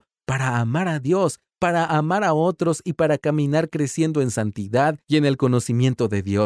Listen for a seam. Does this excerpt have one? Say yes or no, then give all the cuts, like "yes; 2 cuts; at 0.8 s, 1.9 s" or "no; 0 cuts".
no; 0 cuts